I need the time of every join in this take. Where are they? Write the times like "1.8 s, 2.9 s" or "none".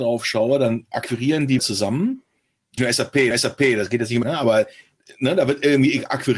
1.6 s, 2.8 s, 3.3 s, 4.2 s